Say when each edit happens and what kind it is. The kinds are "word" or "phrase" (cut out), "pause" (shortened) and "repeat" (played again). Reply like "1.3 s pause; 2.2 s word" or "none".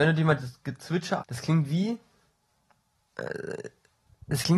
1.2 s word